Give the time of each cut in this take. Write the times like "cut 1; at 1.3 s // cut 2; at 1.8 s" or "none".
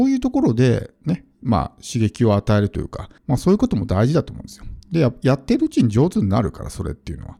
cut 1; at 3.2 s